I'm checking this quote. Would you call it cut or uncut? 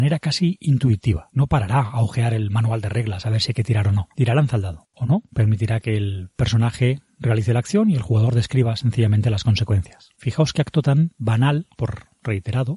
uncut